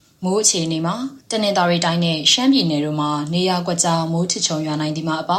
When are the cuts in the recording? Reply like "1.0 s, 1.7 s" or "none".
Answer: 1.2 s